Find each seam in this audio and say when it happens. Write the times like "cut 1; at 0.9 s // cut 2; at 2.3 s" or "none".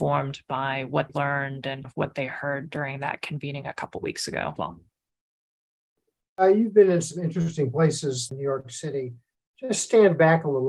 cut 1; at 1.1 s // cut 2; at 1.8 s // cut 3; at 4.6 s // cut 4; at 8.3 s